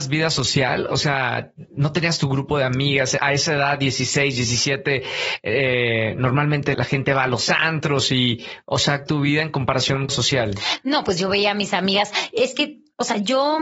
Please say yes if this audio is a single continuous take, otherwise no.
no